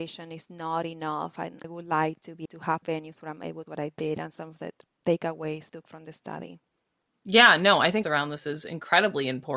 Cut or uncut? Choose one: cut